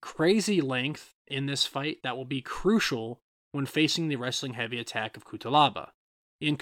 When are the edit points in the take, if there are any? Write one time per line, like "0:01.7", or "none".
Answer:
none